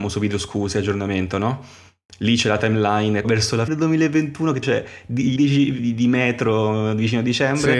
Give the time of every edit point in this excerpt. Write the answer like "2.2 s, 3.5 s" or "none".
3.2 s, 3.7 s, 4.6 s, 5.4 s, 5.8 s